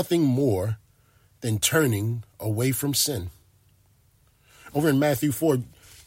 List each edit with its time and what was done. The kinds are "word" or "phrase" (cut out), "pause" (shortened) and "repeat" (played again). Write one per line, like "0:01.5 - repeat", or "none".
none